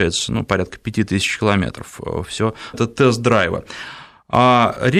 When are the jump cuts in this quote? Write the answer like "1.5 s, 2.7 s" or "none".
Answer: 2.7 s

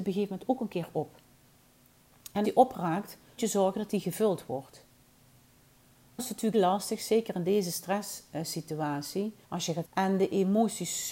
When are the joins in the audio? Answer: 2.4 s, 3.4 s, 6.2 s, 6.5 s, 9.4 s, 9.8 s

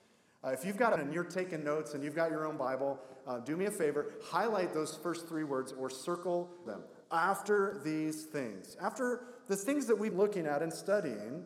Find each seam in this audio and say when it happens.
1.0 s, 6.7 s, 7.0 s, 10.1 s

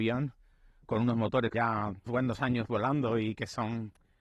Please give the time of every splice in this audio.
1.5 s, 2.1 s

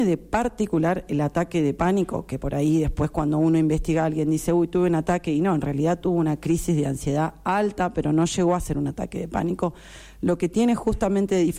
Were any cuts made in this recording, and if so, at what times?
none

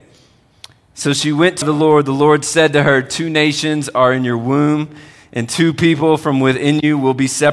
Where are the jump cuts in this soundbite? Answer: 1.6 s

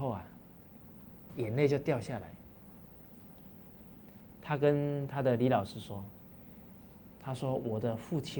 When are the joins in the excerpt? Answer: 1.3 s

